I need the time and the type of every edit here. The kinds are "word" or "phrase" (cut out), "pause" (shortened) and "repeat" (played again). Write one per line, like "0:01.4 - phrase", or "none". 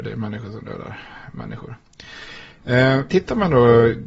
0:03.1 - word

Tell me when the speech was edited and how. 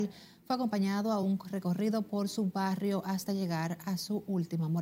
none

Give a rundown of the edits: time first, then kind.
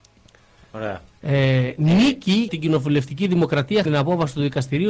0:02.5 - word
0:03.9 - word

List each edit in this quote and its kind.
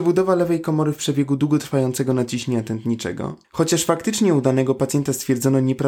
0:03.4 - pause

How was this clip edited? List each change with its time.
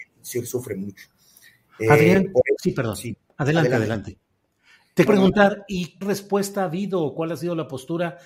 0:05.1 - word
0:06.0 - word

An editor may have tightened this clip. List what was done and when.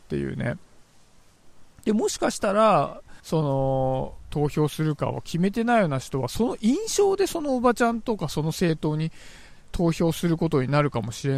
0:03.2 - pause
0:04.3 - phrase

